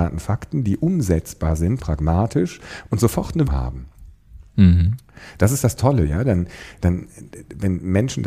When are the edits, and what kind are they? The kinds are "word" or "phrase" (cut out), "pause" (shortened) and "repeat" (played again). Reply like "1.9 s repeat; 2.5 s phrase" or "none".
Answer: 1.8 s word; 3.5 s word